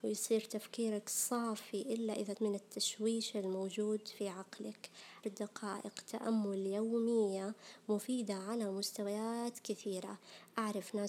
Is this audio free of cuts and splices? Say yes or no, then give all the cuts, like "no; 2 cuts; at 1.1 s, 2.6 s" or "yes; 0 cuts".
no; 2 cuts; at 2.3 s, 5.2 s